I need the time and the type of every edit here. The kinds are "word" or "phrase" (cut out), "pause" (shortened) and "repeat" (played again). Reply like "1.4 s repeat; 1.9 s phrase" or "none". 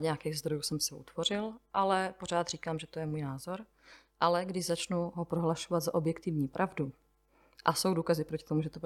none